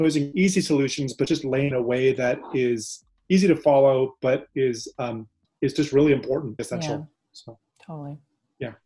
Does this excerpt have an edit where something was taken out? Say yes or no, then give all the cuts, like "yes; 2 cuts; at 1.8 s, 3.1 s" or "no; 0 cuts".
yes; 3 cuts; at 1.7 s, 5.4 s, 6.6 s